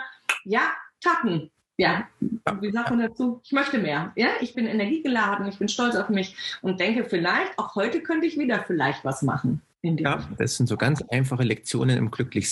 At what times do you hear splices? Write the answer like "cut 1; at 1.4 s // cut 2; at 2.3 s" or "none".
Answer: cut 1; at 1.6 s // cut 2; at 4.5 s // cut 3; at 9.7 s